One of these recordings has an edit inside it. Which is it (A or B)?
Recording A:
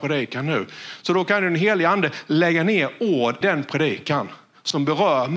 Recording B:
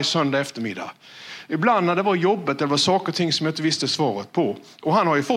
A